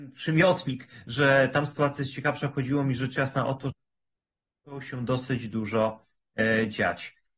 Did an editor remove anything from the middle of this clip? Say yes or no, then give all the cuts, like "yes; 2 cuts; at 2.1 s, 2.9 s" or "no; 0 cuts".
no; 0 cuts